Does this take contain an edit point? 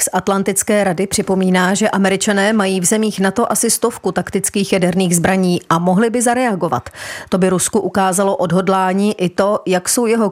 no; 0 cuts

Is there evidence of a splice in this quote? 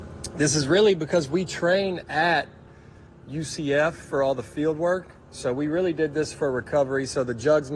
no; 0 cuts

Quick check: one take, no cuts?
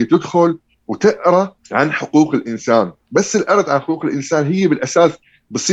yes; 0 cuts

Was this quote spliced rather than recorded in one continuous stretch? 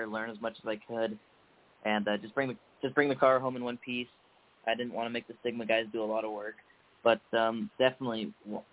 no; 0 cuts

